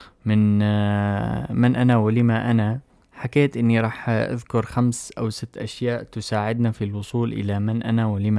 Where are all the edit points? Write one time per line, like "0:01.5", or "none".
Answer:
none